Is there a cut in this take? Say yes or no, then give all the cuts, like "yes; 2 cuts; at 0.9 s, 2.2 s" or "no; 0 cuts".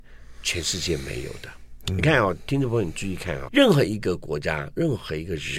yes; 1 cut; at 3.5 s